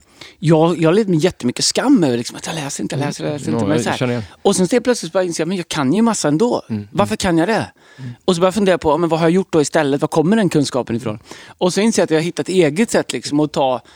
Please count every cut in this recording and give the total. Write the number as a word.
zero